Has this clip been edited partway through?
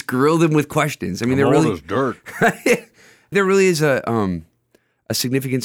yes; 1 cut; at 3.3 s

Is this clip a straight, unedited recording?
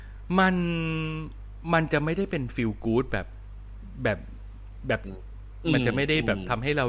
no; 1 cut; at 5.0 s

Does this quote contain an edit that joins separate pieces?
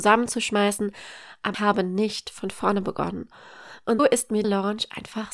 yes; 3 cuts; at 1.5 s, 4.0 s, 4.4 s

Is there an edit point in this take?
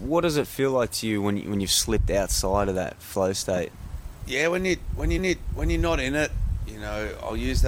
yes; 1 cut; at 5.2 s

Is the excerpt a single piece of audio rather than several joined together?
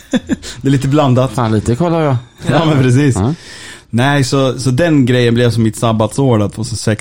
yes; 0 cuts

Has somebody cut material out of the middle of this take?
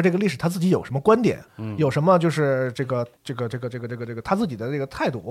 yes; 2 cuts; at 1.5 s, 3.2 s

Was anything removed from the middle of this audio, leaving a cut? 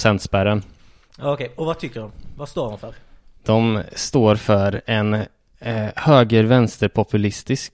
no; 0 cuts

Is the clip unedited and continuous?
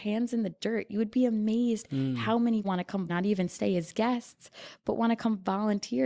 no; 2 cuts; at 2.6 s, 3.1 s

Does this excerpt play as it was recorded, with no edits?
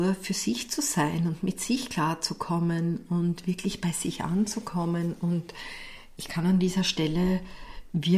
yes; 0 cuts

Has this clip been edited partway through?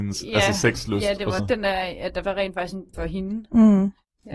yes; 3 cuts; at 1.4 s, 2.2 s, 2.9 s

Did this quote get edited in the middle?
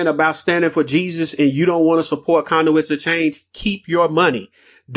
no; 0 cuts

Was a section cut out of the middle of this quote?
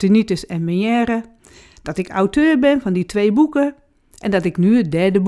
no; 0 cuts

